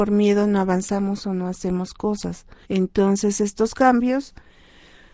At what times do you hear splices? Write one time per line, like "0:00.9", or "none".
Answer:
0:02.6